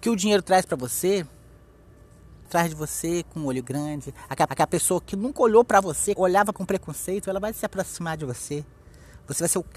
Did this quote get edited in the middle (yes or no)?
yes